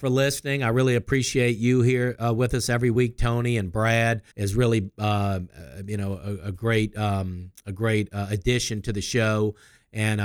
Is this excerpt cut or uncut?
cut